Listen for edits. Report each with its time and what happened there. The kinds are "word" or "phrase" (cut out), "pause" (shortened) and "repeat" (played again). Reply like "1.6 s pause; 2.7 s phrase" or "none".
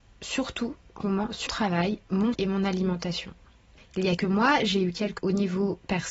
1.0 s word; 1.5 s word; 2.3 s word; 4.2 s word; 5.2 s word